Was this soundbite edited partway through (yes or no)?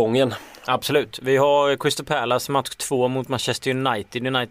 no